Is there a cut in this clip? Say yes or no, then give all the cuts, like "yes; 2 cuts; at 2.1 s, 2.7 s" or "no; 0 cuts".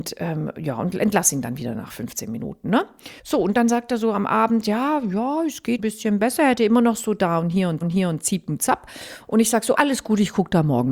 yes; 4 cuts; at 3.2 s, 5.8 s, 7.8 s, 9.7 s